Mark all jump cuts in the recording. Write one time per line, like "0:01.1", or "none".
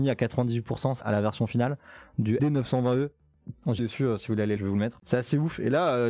0:01.0
0:02.4
0:03.8
0:04.6